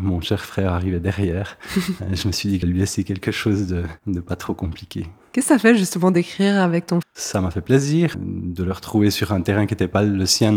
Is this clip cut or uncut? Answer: cut